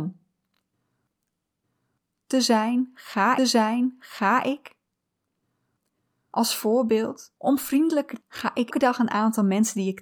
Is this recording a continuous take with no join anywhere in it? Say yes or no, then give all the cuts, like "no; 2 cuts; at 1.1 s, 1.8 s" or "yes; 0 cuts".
no; 4 cuts; at 3.4 s, 7.4 s, 8.2 s, 8.7 s